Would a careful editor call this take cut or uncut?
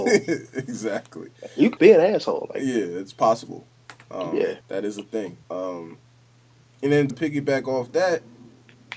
cut